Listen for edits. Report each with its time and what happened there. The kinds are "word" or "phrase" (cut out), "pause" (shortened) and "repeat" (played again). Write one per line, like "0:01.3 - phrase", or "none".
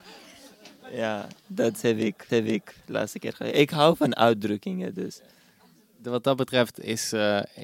0:02.3 - repeat